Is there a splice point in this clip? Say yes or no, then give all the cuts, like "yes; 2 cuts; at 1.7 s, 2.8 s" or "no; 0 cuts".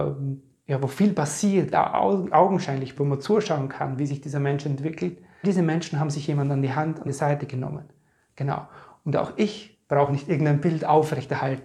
yes; 4 cuts; at 1.7 s, 3.0 s, 5.4 s, 7.1 s